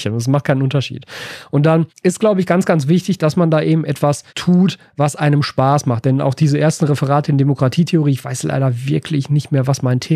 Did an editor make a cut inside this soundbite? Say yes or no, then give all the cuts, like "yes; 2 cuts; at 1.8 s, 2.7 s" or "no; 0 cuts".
yes; 2 cuts; at 1.9 s, 4.3 s